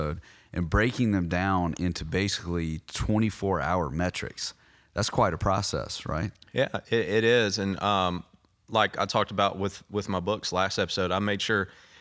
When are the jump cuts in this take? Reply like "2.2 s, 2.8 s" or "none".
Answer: none